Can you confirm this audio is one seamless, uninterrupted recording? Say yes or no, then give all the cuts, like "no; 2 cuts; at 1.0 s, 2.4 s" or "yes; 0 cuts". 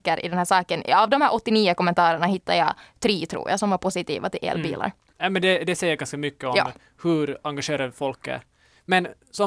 yes; 0 cuts